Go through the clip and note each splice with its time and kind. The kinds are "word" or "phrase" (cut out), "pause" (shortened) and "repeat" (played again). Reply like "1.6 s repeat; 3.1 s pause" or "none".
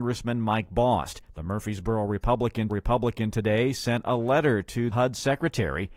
1.2 s pause; 2.7 s repeat; 4.9 s word